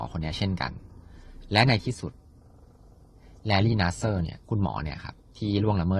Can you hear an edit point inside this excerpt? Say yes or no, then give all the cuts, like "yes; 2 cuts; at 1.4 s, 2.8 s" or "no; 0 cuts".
yes; 1 cut; at 4.4 s